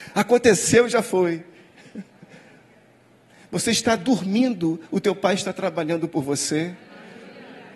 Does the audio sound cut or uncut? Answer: uncut